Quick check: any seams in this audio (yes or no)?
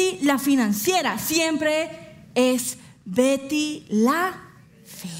no